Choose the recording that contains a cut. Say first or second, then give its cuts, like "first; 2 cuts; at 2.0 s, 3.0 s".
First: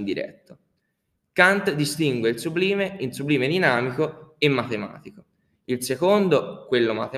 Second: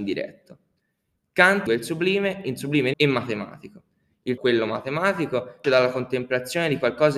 second; 4 cuts; at 1.7 s, 2.9 s, 4.4 s, 5.6 s